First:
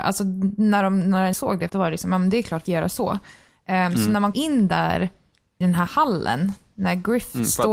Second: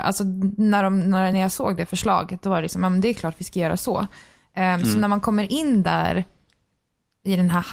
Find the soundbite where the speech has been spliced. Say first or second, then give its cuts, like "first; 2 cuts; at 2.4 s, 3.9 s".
first; 5 cuts; at 1.3 s, 1.7 s, 2.7 s, 4.3 s, 5.6 s